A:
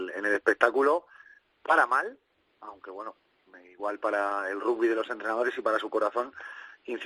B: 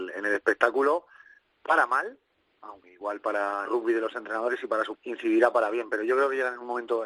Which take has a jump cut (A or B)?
B